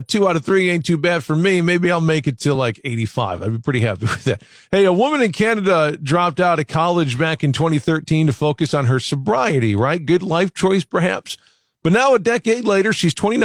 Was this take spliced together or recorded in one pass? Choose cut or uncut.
uncut